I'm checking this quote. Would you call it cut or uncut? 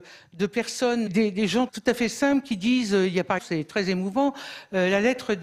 cut